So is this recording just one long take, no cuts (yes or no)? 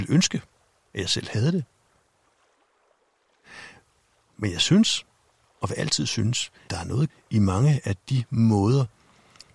no